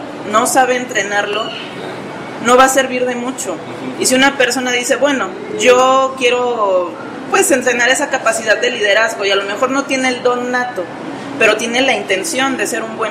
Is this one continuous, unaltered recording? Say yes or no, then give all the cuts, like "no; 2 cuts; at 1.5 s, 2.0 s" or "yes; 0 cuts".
yes; 0 cuts